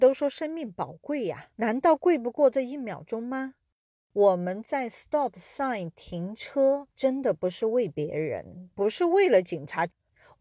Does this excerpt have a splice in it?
yes; 3 cuts; at 1.5 s, 6.9 s, 8.7 s

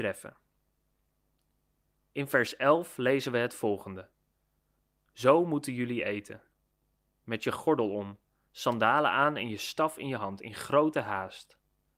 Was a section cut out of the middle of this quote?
no; 0 cuts

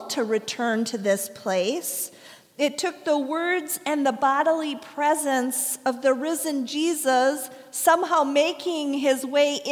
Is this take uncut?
yes; 0 cuts

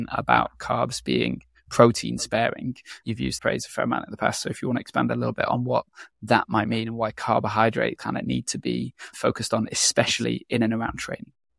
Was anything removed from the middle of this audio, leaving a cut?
yes; 2 cuts; at 3.4 s, 8.0 s

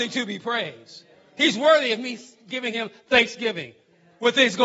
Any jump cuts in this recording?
no; 0 cuts

